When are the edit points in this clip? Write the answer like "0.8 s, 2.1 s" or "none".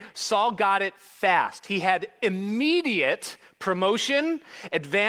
none